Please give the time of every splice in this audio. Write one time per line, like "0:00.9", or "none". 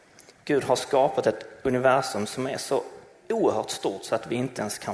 none